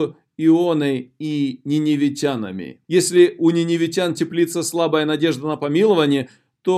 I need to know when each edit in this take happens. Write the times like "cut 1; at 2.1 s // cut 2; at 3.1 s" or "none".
cut 1; at 2.8 s

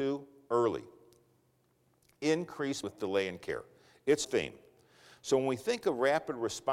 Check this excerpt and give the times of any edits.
cut 1; at 2.8 s // cut 2; at 4.2 s

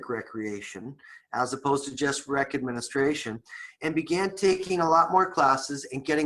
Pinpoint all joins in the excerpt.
none

